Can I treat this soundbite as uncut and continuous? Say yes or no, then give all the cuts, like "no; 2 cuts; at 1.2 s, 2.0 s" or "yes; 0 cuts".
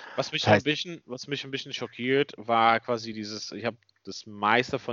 yes; 0 cuts